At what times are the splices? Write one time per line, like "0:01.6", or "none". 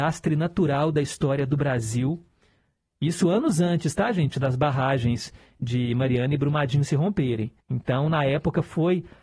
0:07.6